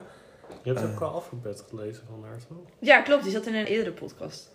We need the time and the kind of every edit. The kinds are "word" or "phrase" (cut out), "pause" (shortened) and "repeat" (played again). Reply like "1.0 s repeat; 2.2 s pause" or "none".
3.6 s word